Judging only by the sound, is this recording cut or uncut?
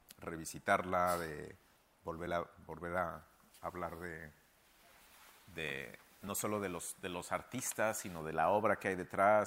uncut